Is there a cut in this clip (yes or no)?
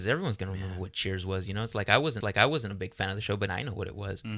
yes